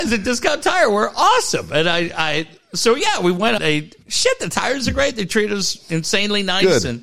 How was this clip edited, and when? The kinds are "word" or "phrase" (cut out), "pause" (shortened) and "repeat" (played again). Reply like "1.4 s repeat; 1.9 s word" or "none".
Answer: 3.6 s phrase